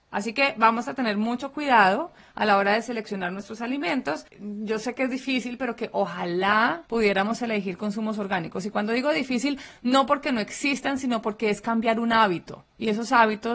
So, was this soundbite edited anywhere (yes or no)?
no